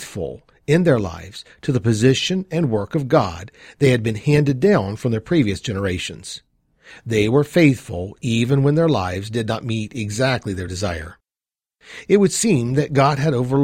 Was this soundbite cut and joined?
no; 0 cuts

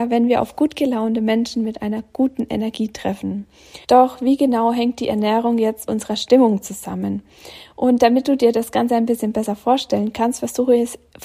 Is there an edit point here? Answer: yes; 2 cuts; at 3.8 s, 5.9 s

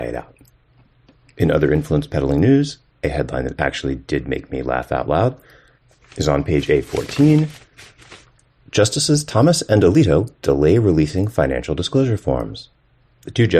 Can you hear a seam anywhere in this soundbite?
no; 0 cuts

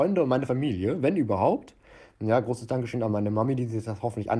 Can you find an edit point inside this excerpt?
no; 0 cuts

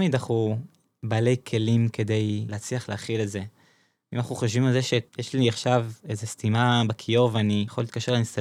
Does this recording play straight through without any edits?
no; 1 cut; at 5.1 s

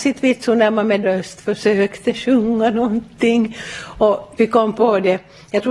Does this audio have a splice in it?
yes; 2 cuts; at 1.0 s, 4.4 s

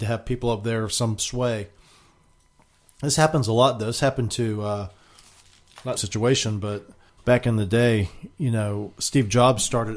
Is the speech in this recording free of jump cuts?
no; 3 cuts; at 1.2 s, 6.0 s, 7.1 s

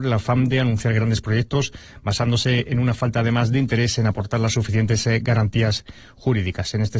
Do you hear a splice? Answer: no; 0 cuts

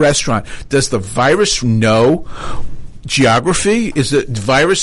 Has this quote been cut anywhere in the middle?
yes; 1 cut; at 1.6 s

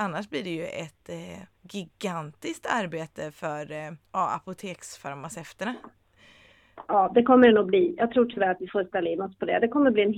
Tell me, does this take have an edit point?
yes; 1 cut; at 4.0 s

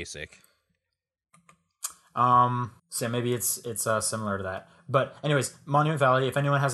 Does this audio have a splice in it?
yes; 1 cut; at 2.8 s

